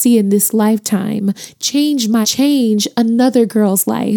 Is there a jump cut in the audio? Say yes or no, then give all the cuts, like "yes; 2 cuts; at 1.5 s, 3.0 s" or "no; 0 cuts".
yes; 1 cut; at 2.2 s